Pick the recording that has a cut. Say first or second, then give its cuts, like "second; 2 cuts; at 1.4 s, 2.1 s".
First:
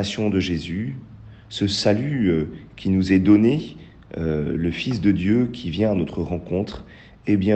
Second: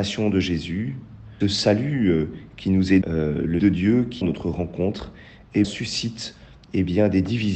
second; 5 cuts; at 1.4 s, 3.0 s, 3.6 s, 4.2 s, 5.6 s